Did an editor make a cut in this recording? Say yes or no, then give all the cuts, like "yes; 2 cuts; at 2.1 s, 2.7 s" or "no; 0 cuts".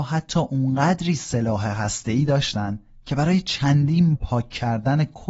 yes; 1 cut; at 4.1 s